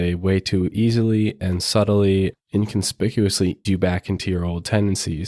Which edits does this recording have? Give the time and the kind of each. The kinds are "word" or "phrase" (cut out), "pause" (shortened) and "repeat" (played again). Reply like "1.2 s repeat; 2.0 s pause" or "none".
2.3 s word; 3.6 s word